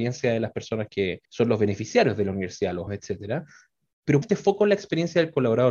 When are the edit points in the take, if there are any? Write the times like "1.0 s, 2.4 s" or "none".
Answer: 1.2 s, 2.9 s, 4.2 s

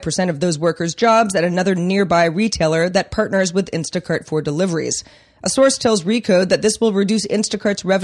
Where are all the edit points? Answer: none

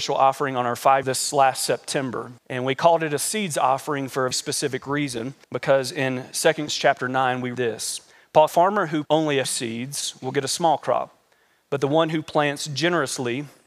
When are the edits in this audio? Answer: 1.0 s, 2.4 s, 4.3 s, 5.4 s, 6.7 s, 7.5 s, 8.5 s, 9.0 s, 9.4 s

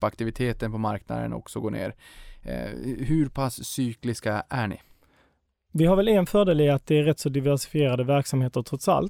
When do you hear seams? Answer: none

